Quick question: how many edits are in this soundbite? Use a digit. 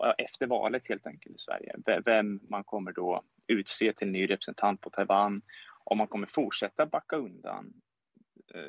0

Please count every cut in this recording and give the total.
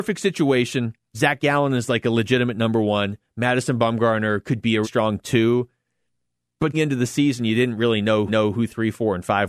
4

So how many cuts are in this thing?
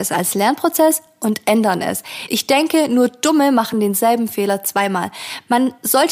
0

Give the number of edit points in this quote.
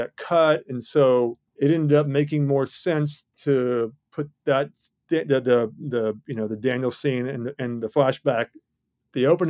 1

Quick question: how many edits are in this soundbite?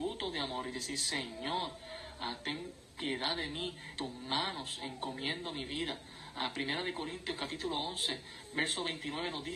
1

